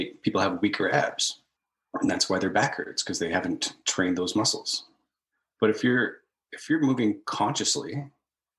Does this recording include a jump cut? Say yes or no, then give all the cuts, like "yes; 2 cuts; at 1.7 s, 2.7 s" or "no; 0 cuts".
no; 0 cuts